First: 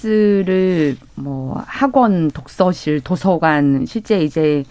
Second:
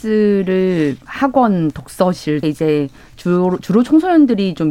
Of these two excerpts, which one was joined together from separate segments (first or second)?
second